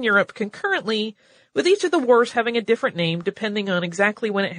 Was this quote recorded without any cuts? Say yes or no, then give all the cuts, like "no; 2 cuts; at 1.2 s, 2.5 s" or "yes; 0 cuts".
yes; 0 cuts